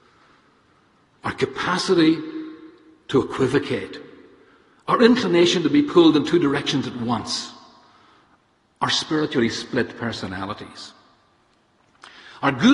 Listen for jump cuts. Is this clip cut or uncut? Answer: uncut